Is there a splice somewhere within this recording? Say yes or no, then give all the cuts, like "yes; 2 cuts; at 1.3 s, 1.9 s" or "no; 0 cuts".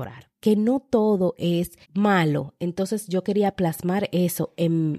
yes; 1 cut; at 1.8 s